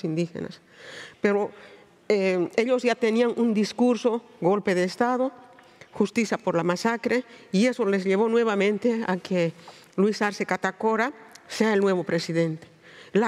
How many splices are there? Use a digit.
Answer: 0